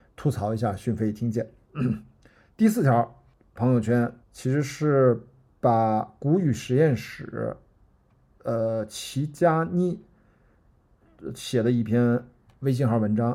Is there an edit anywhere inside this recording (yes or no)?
yes